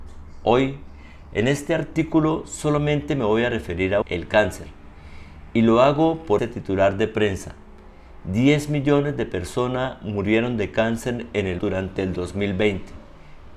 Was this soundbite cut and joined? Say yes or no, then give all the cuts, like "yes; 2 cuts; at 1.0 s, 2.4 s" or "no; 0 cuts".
yes; 3 cuts; at 4.0 s, 6.4 s, 11.6 s